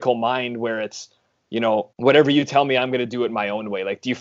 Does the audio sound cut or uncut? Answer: cut